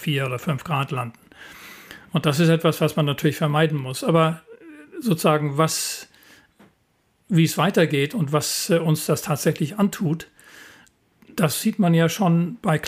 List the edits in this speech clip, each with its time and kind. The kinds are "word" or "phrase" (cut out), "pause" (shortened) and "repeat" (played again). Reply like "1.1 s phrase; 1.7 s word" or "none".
none

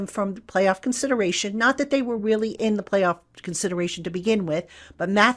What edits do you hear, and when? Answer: none

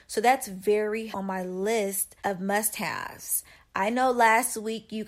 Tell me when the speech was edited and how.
1.1 s phrase; 2.2 s pause

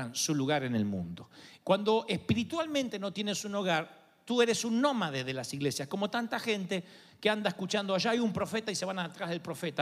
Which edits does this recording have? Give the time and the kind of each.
none

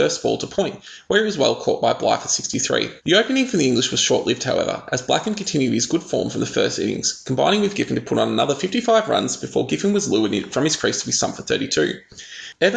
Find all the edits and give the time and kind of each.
3.0 s pause

